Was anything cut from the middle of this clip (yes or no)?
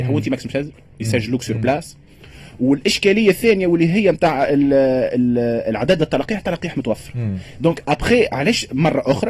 no